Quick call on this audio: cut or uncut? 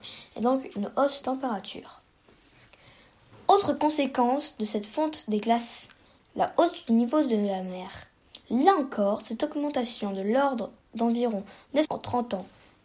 cut